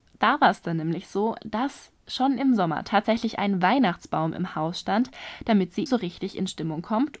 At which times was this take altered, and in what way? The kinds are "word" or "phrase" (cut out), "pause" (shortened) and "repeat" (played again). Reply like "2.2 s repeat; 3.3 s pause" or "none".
2.0 s pause; 5.9 s word